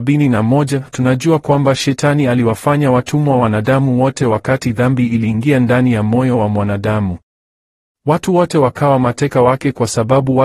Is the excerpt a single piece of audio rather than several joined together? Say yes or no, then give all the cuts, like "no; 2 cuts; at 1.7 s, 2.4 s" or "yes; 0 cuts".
yes; 0 cuts